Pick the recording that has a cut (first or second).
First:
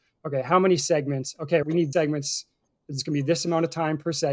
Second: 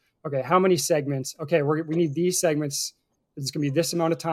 first